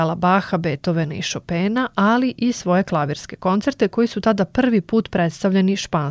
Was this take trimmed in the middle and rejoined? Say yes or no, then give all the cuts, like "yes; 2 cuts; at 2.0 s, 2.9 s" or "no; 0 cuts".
no; 0 cuts